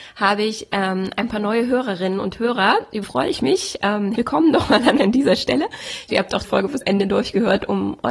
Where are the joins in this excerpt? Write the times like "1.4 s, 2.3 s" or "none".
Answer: 3.0 s, 4.2 s, 5.0 s, 6.1 s, 6.4 s, 6.8 s

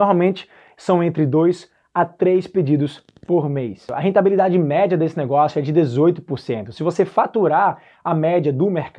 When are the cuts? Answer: none

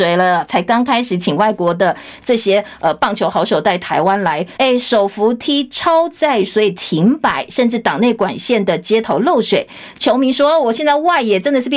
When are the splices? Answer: 4.6 s

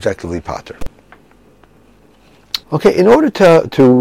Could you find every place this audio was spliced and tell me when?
2.6 s

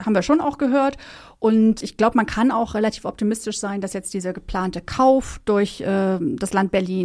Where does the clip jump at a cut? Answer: 1.8 s

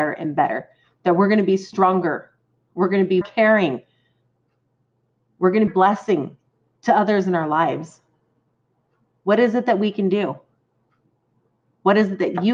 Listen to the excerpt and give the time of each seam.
3.2 s, 5.7 s

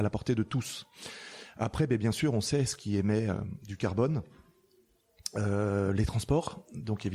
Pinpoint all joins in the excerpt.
none

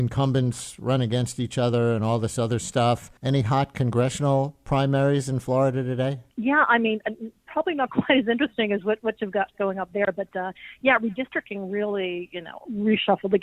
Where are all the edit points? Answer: 3.2 s, 6.3 s

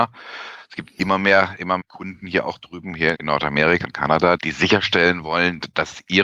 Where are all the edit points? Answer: 1.8 s, 3.1 s, 3.8 s, 4.4 s

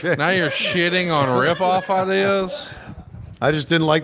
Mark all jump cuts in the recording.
none

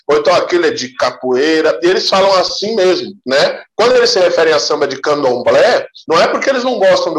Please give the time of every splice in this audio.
3.2 s, 6.0 s

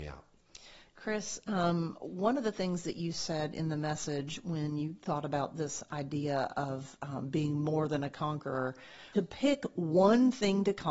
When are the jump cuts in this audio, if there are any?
9.1 s

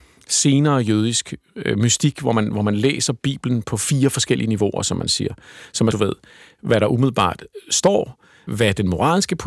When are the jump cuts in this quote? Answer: 5.9 s, 8.5 s

